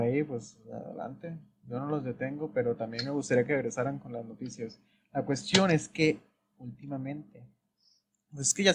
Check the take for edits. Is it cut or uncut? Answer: uncut